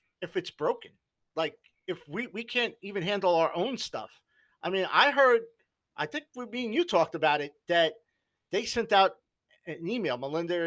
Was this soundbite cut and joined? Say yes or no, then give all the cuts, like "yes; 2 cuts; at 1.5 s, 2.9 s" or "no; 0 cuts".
no; 0 cuts